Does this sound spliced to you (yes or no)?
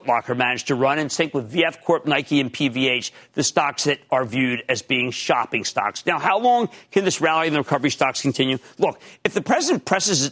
no